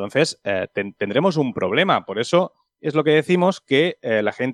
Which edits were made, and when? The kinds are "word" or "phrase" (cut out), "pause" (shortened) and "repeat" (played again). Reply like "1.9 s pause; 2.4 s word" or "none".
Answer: none